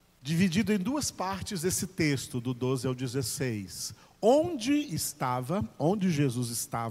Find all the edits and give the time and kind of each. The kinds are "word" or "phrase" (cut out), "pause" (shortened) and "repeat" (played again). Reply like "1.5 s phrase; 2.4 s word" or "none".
none